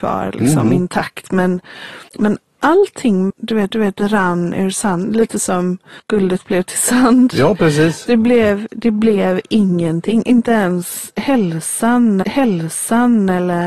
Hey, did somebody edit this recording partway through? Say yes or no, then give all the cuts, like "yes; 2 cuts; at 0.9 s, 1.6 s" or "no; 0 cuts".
yes; 5 cuts; at 2.1 s, 3.3 s, 3.7 s, 6.0 s, 12.2 s